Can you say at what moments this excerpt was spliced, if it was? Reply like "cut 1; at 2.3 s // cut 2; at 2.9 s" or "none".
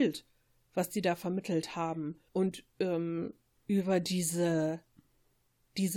cut 1; at 2.3 s // cut 2; at 3.5 s